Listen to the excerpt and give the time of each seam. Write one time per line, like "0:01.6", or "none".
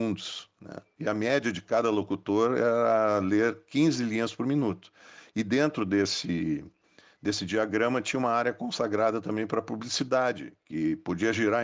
none